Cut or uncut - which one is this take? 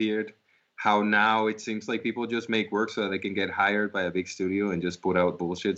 uncut